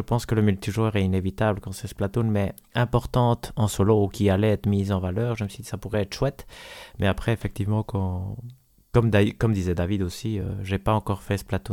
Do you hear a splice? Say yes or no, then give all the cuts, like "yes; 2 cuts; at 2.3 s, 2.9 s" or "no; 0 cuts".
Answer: no; 0 cuts